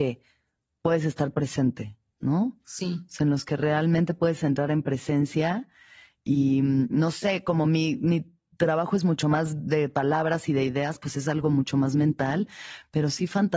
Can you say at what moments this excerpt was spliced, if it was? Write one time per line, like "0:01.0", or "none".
none